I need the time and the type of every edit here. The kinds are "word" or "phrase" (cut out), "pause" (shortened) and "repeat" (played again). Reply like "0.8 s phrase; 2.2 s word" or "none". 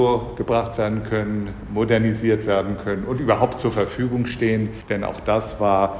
none